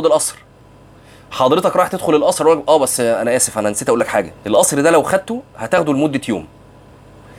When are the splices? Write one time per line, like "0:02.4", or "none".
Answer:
0:04.4